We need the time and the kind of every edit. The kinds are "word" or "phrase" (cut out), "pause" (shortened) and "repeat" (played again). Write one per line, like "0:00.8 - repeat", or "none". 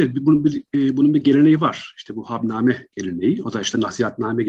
none